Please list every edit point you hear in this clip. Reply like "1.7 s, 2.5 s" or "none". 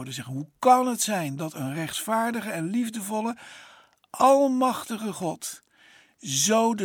none

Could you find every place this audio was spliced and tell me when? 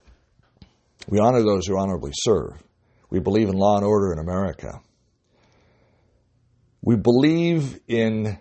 none

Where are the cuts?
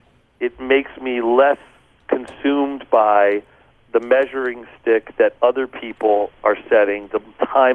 none

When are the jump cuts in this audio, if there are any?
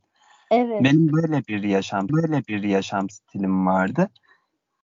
2.1 s

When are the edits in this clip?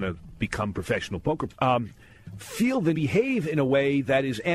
1.5 s, 2.9 s

